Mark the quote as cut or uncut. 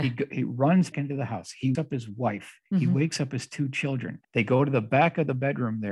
cut